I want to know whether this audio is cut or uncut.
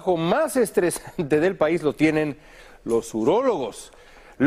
uncut